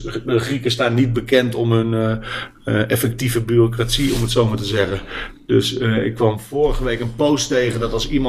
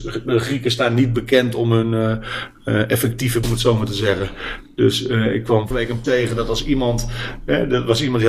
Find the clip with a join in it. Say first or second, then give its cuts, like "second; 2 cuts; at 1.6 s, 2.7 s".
second; 3 cuts; at 3.4 s, 5.7 s, 6.0 s